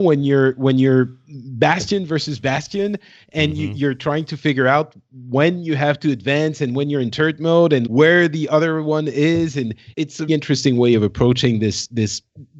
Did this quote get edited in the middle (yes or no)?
yes